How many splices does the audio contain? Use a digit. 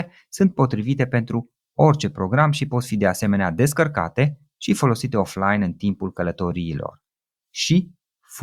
0